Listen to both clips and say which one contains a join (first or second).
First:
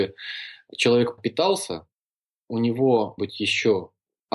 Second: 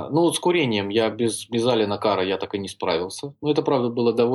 first